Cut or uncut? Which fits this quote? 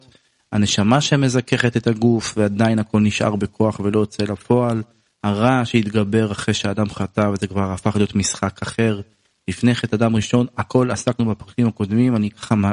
uncut